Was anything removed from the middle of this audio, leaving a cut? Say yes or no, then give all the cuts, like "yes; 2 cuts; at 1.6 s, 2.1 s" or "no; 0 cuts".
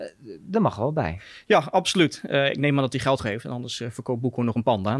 yes; 1 cut; at 3.2 s